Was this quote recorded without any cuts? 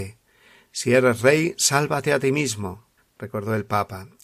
no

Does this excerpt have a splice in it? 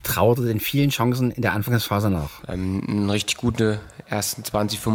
no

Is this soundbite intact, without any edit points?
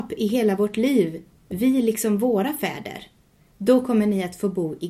yes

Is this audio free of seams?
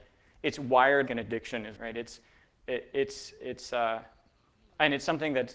no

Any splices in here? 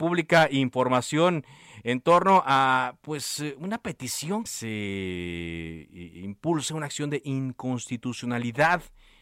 yes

